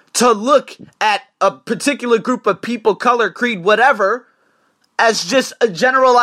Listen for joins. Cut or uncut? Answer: uncut